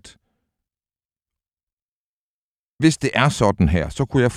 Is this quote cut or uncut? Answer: uncut